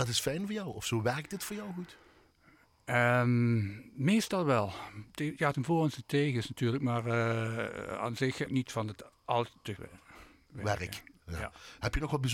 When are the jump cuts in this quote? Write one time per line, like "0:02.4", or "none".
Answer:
0:05.5
0:08.5
0:09.8